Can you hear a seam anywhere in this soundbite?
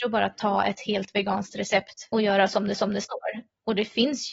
yes; 2 cuts; at 2.1 s, 2.7 s

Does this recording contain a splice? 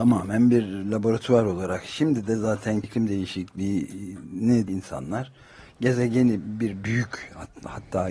yes; 3 cuts; at 2.8 s, 4.7 s, 6.8 s

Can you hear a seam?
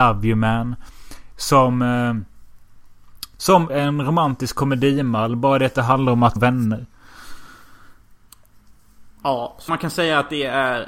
yes; 4 cuts; at 3.7 s, 6.4 s, 9.2 s, 9.7 s

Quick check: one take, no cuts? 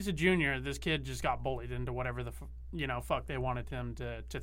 yes; 0 cuts

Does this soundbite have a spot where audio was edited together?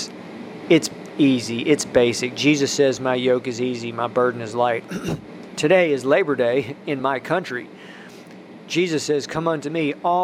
no; 0 cuts

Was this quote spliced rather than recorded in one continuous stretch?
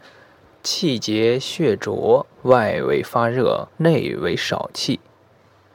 yes; 2 cuts; at 2.3 s, 3.7 s

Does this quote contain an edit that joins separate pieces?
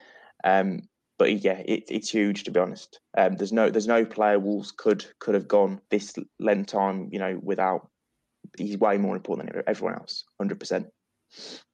yes; 3 cuts; at 5.8 s, 6.6 s, 8.6 s

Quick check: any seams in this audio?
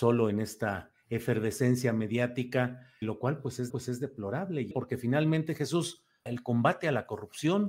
yes; 4 cuts; at 3.0 s, 3.7 s, 4.7 s, 6.3 s

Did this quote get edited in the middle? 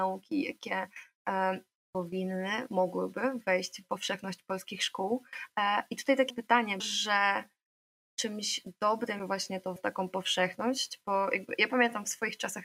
yes; 6 cuts; at 1.8 s, 3.8 s, 6.3 s, 6.8 s, 9.2 s, 9.8 s

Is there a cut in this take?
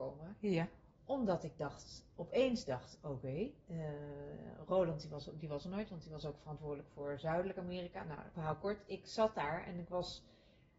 yes; 2 cuts; at 3.6 s, 8.3 s

